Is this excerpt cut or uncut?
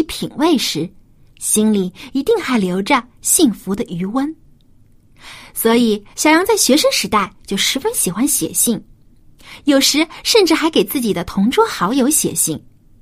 cut